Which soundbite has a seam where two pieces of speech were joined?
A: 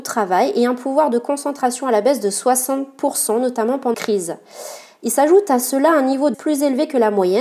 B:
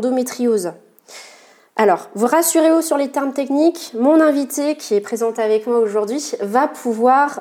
A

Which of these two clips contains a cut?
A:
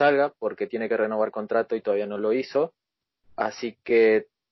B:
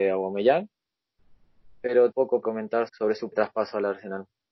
B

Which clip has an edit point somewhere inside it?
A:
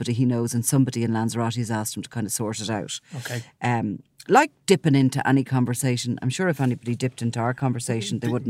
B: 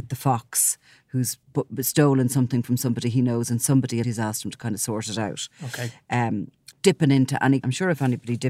B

